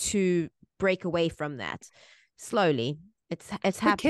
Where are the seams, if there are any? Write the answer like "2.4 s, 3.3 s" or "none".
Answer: none